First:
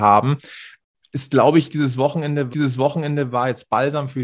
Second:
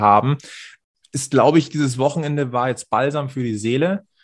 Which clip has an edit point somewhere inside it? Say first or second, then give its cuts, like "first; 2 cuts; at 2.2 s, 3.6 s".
first; 1 cut; at 2.5 s